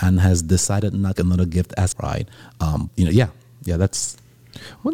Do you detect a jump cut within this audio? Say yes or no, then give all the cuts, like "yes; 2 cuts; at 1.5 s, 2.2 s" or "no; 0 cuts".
yes; 3 cuts; at 1.1 s, 1.9 s, 2.9 s